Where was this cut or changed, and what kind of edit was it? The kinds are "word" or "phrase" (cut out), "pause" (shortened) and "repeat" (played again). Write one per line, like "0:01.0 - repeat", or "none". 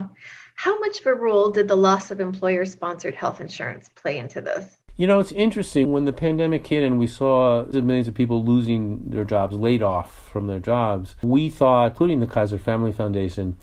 0:05.8 - word
0:07.7 - word